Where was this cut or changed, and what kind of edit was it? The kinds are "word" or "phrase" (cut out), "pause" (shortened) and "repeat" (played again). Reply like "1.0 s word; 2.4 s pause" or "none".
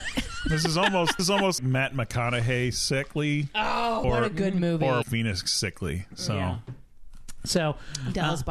1.2 s word; 1.6 s word; 4.0 s word; 5.0 s word